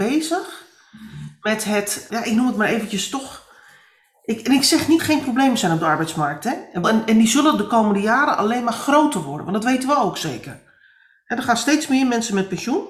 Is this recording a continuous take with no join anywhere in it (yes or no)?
no